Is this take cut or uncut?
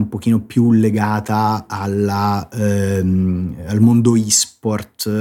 uncut